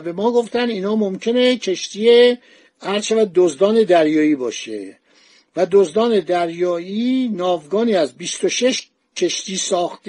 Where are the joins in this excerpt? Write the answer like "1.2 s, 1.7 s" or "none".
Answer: none